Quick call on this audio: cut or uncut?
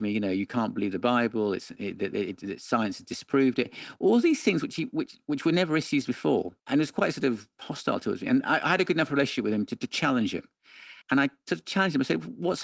cut